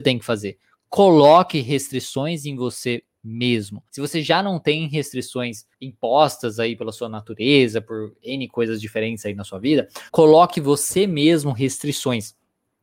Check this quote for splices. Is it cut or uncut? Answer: cut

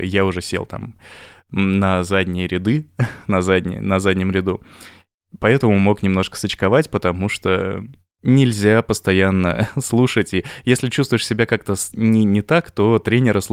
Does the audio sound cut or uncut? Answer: uncut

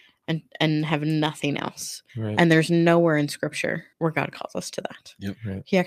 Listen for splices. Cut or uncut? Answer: cut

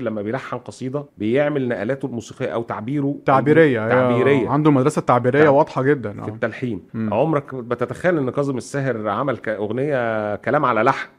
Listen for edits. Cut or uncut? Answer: cut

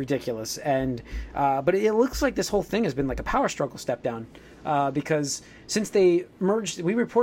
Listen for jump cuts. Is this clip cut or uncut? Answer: uncut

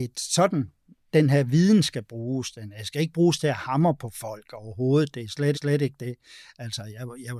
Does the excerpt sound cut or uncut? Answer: cut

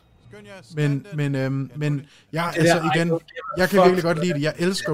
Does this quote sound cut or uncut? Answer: uncut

